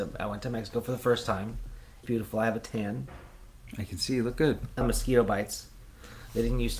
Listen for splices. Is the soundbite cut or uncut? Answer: cut